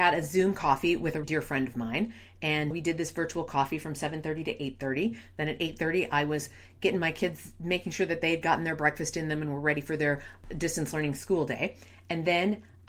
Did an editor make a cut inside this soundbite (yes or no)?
yes